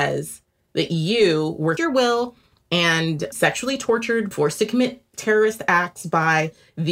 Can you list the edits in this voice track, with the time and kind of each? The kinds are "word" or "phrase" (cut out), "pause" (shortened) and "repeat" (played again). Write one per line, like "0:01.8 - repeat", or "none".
0:01.8 - phrase
0:03.3 - word
0:04.3 - phrase